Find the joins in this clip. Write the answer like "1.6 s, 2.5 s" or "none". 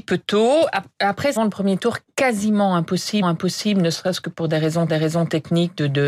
1.4 s, 3.2 s, 4.9 s